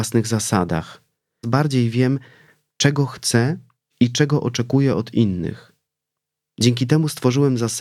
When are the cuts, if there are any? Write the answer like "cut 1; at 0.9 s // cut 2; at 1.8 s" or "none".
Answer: cut 1; at 1.4 s